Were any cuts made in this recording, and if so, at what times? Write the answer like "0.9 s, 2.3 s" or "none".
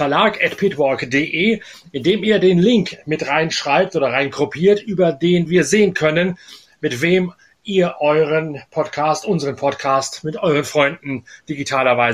none